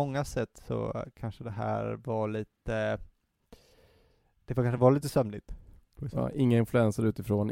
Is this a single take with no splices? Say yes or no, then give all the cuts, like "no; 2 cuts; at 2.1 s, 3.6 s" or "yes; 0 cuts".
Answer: yes; 0 cuts